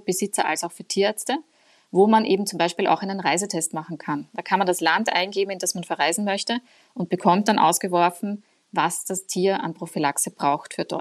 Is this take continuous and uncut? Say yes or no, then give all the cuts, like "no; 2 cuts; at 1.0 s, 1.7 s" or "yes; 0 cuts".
yes; 0 cuts